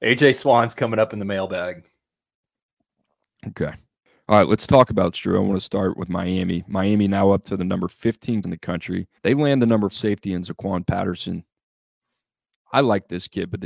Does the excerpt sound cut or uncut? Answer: cut